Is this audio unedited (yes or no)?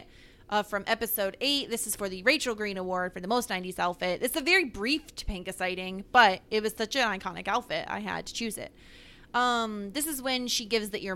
yes